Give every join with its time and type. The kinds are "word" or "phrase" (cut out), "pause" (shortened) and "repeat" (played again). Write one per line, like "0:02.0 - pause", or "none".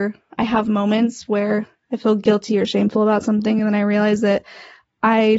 none

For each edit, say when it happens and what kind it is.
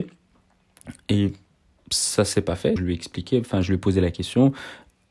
0:02.8 - word

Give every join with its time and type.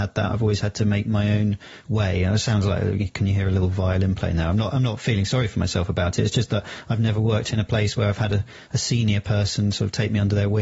none

